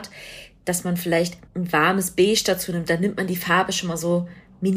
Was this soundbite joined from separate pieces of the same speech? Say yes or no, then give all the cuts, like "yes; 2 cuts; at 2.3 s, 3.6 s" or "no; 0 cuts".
yes; 1 cut; at 1.5 s